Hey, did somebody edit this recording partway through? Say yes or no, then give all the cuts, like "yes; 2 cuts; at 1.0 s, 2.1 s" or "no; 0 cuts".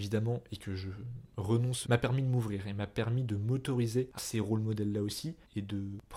yes; 2 cuts; at 1.8 s, 4.2 s